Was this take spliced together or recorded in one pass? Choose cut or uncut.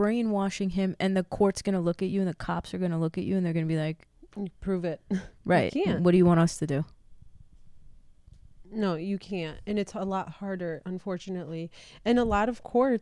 uncut